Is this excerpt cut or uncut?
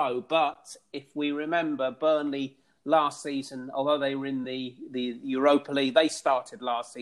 uncut